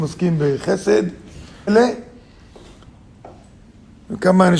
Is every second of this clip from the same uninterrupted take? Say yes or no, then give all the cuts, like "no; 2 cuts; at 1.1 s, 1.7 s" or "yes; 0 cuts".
no; 1 cut; at 1.7 s